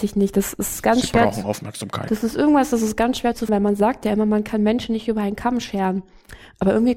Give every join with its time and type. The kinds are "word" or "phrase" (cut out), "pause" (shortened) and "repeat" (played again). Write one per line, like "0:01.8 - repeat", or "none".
0:03.5 - word

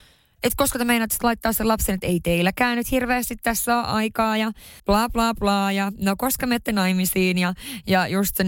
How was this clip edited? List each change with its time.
0:04.8 - pause

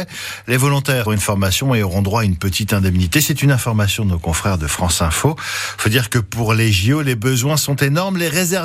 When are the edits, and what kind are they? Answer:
0:01.1 - word

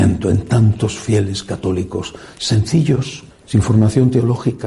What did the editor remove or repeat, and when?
0:03.3 - pause

